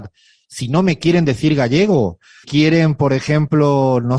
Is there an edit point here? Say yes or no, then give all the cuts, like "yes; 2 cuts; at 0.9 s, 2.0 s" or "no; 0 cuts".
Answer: yes; 1 cut; at 2.4 s